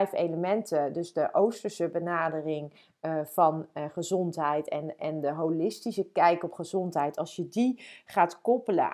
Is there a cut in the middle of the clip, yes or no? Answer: no